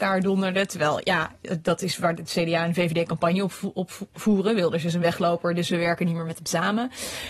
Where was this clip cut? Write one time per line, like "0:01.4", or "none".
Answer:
none